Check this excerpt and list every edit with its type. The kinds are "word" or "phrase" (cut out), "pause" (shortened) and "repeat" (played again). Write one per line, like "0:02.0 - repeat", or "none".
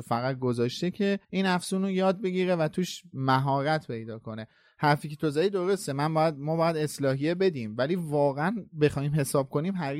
0:01.2 - pause